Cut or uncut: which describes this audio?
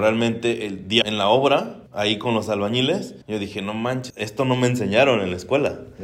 cut